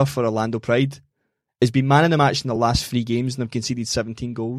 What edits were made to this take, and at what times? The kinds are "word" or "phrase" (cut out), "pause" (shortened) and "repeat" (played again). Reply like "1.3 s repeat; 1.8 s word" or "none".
none